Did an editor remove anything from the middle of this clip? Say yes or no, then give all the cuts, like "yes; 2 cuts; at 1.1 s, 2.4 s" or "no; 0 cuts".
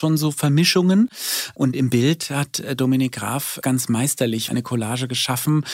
yes; 2 cuts; at 3.6 s, 4.5 s